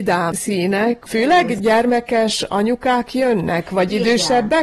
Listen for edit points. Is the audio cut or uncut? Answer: uncut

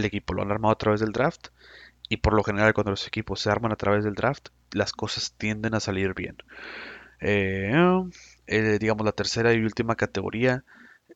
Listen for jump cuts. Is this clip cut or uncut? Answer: uncut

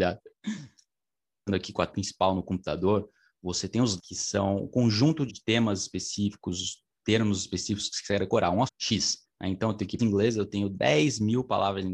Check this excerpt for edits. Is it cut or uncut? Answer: cut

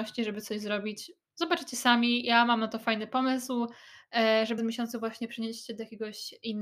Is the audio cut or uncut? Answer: cut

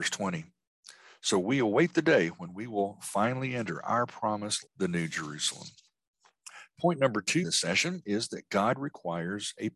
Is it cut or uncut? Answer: cut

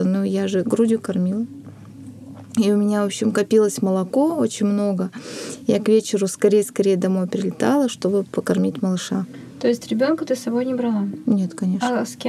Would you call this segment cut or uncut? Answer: uncut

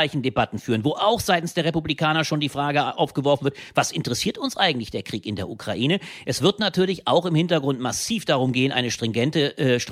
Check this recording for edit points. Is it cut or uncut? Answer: uncut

